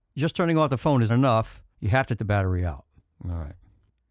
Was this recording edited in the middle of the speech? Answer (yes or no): yes